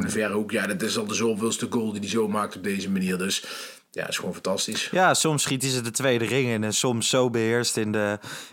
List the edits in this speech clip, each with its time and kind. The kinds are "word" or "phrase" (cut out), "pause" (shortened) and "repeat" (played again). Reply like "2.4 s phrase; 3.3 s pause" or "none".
none